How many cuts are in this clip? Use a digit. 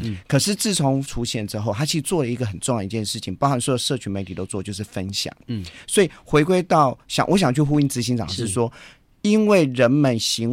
1